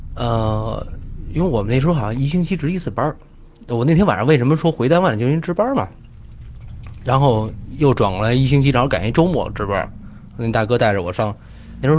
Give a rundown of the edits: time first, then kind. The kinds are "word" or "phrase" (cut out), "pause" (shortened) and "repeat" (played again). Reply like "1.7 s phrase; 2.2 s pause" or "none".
none

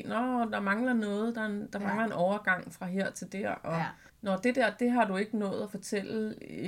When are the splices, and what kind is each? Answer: 4.1 s pause

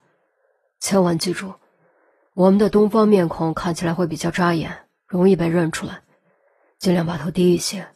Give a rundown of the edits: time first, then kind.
none

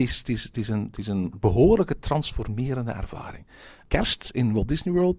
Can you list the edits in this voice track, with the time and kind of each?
none

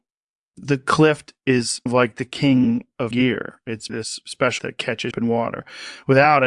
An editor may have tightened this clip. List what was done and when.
1.9 s word; 3.1 s word; 3.9 s word; 4.6 s word; 5.1 s word

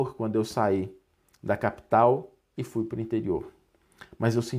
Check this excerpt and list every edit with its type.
none

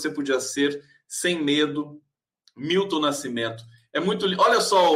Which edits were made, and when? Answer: none

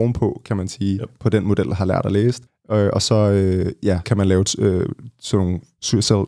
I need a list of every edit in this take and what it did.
2.5 s pause; 4.0 s word

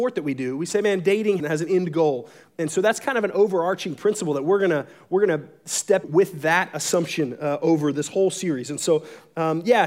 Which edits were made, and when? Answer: 1.4 s phrase; 6.0 s word

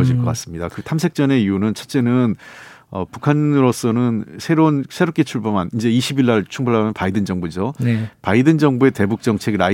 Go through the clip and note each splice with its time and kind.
none

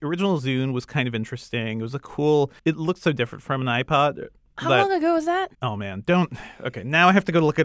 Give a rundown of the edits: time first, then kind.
2.6 s pause; 5.5 s pause

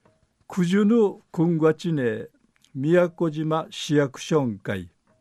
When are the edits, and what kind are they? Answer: none

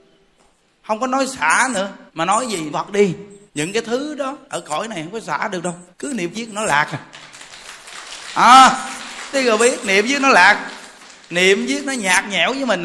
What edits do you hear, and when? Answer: 2.1 s pause; 2.7 s word; 3.5 s pause; 4.4 s pause; 5.9 s pause; 6.3 s phrase; 9.3 s word

